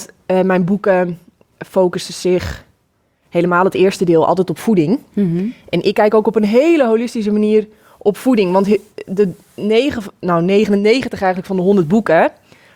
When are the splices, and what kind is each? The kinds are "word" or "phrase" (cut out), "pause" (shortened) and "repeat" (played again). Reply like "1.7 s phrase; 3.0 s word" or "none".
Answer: none